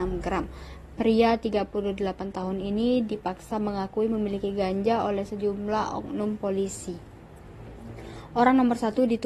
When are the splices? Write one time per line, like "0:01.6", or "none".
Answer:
none